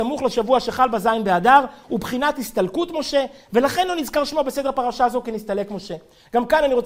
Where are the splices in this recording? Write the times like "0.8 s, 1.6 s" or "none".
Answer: none